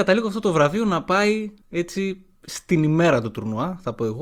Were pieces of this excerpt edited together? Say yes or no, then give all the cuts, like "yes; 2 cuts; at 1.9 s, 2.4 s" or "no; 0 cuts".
yes; 1 cut; at 1.6 s